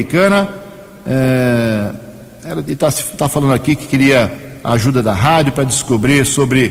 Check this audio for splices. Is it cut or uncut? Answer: uncut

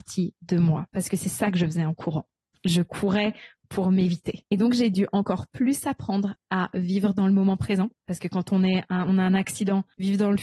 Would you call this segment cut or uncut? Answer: cut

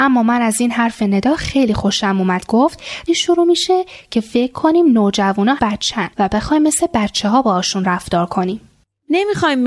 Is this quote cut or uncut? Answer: cut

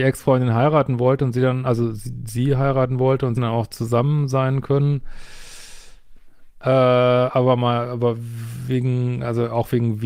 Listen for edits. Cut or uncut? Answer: cut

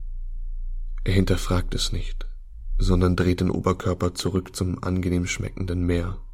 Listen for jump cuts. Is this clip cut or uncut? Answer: uncut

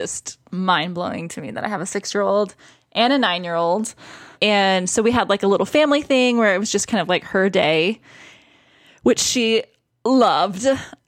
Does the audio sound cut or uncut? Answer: uncut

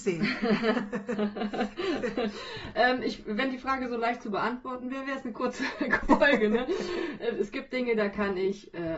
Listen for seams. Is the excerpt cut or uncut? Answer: cut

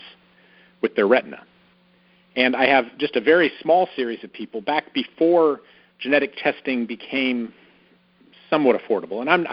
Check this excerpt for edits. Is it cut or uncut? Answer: uncut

